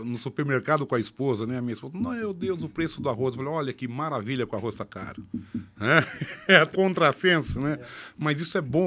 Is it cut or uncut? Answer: cut